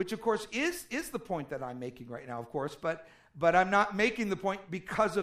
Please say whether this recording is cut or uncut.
uncut